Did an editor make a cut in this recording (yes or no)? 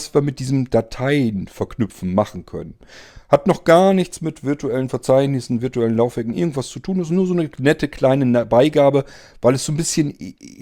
no